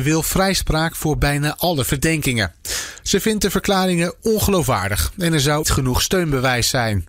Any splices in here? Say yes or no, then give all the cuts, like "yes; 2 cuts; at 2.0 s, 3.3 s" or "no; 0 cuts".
yes; 1 cut; at 5.6 s